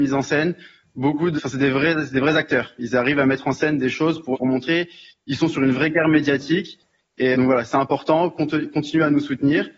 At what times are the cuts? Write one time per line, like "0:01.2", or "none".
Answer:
0:01.4
0:04.3
0:07.3